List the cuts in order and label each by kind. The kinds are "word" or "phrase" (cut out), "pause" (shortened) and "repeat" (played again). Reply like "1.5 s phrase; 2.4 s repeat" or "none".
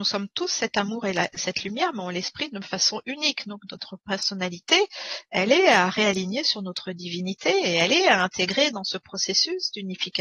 none